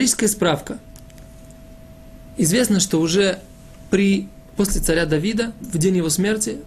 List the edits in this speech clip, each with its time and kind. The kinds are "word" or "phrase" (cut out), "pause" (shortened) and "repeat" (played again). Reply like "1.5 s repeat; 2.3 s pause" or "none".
4.7 s word; 5.6 s word